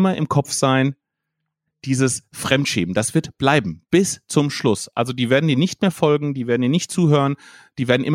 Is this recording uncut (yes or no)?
yes